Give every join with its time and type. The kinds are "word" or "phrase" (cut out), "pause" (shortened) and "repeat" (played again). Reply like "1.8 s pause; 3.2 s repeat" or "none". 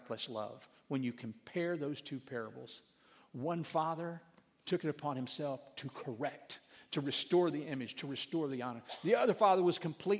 none